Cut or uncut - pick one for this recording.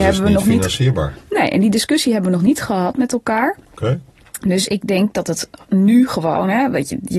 uncut